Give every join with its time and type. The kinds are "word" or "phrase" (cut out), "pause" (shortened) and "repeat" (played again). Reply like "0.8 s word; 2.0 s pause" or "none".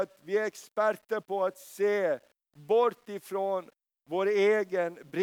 none